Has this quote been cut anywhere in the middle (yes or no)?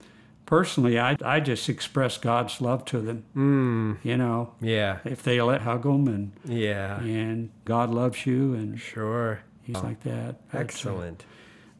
yes